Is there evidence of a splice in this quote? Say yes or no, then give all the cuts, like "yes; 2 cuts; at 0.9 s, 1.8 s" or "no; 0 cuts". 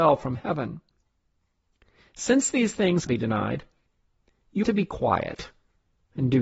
yes; 2 cuts; at 3.1 s, 4.6 s